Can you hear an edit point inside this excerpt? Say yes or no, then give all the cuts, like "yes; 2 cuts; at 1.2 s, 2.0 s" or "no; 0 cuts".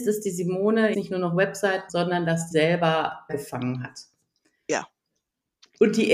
yes; 4 cuts; at 0.9 s, 1.9 s, 2.5 s, 3.3 s